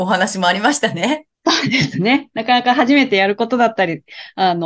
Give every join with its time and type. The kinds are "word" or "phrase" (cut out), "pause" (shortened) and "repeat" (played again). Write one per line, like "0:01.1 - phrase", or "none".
0:01.3 - pause

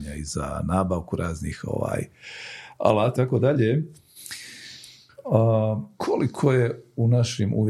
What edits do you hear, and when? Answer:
0:03.2 - word

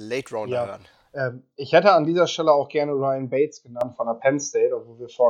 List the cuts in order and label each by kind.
none

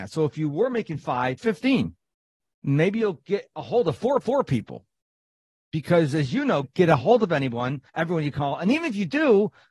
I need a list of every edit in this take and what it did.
0:01.4 - word
0:04.2 - repeat
0:06.6 - phrase
0:07.9 - pause

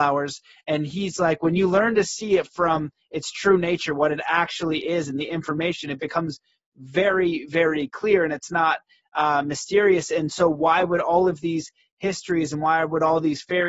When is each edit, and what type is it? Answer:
none

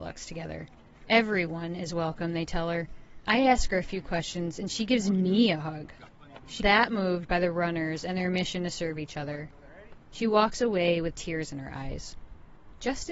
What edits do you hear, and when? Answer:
0:06.6 - word

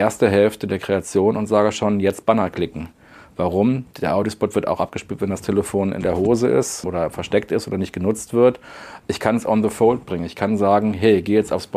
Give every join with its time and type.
0:03.9 - pause

